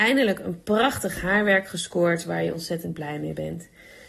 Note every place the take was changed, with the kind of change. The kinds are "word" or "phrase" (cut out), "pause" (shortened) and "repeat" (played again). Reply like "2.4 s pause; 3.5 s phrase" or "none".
none